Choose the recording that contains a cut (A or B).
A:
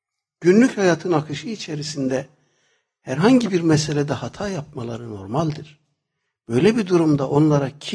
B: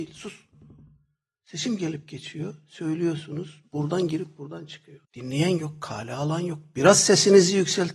B